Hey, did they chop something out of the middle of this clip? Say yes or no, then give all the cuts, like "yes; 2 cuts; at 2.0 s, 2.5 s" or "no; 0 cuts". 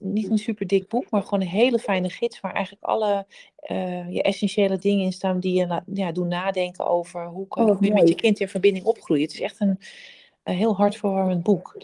no; 0 cuts